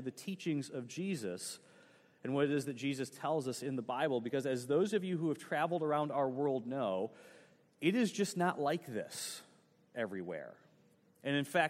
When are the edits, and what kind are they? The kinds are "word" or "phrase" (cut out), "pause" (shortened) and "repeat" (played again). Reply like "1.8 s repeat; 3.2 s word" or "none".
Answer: none

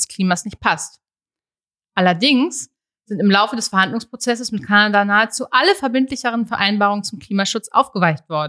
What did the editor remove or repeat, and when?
none

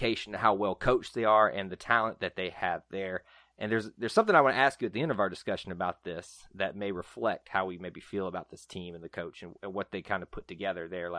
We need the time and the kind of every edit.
none

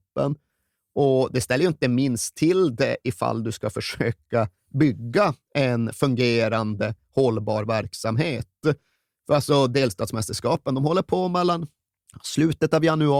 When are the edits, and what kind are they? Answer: none

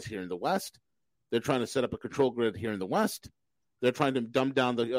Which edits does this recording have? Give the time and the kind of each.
none

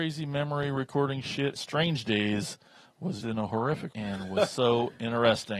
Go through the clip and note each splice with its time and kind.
1.5 s word; 3.2 s word; 3.9 s word

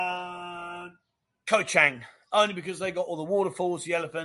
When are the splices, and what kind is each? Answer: none

